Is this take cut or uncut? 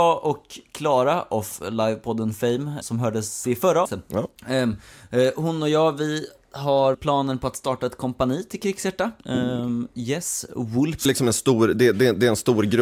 cut